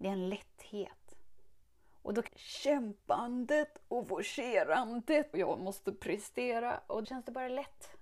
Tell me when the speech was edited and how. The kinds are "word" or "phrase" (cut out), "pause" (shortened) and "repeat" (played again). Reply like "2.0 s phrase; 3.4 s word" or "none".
1.6 s pause; 2.3 s phrase; 5.3 s word; 7.0 s word